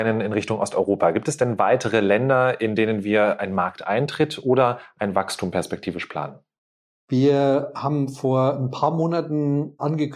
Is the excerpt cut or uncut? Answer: uncut